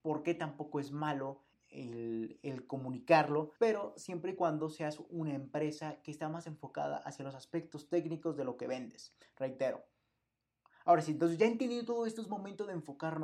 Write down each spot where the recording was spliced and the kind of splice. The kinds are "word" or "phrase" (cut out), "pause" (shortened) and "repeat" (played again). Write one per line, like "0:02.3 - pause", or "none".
0:01.5 - word
0:03.6 - pause